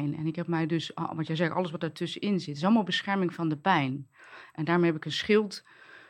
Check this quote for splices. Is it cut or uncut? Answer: uncut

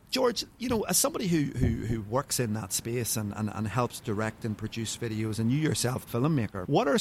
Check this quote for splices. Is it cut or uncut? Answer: cut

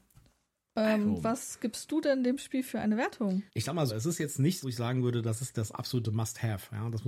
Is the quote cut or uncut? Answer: cut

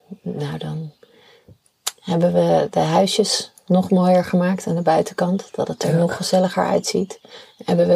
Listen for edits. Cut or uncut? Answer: uncut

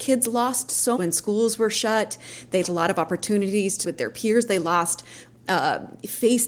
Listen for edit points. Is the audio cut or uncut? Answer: cut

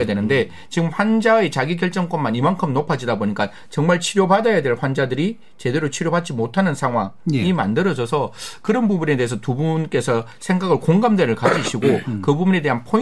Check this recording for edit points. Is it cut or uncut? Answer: uncut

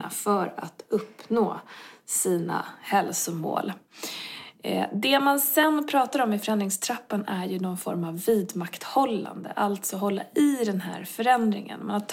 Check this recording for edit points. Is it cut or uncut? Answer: uncut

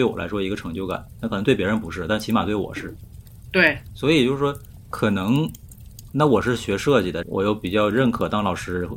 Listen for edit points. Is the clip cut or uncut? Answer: cut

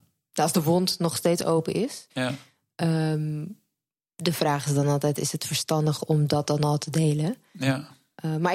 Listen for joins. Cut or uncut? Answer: uncut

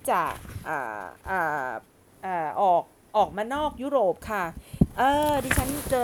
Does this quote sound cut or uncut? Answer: uncut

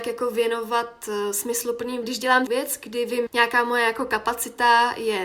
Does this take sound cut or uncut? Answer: cut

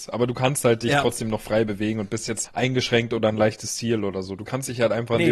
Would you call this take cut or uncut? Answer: cut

